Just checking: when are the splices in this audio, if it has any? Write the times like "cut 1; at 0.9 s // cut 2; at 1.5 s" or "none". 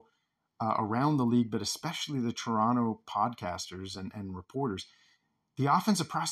none